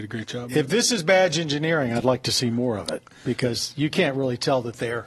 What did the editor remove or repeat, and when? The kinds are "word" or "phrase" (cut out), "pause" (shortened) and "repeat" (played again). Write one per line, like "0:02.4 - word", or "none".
none